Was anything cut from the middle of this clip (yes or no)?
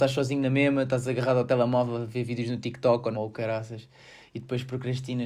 yes